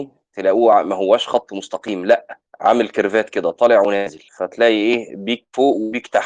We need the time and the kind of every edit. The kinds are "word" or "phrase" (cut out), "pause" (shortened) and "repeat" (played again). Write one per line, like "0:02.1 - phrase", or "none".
0:02.4 - pause
0:04.3 - pause